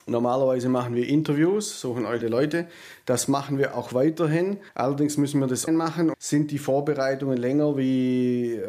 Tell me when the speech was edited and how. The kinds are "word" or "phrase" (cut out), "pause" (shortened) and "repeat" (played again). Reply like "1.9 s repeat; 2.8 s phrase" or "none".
2.2 s word; 4.7 s pause; 5.7 s word; 6.1 s word